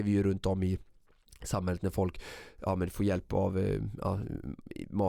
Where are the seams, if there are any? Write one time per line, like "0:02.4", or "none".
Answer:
none